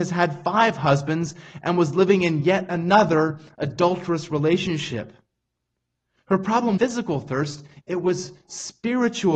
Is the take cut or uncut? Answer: cut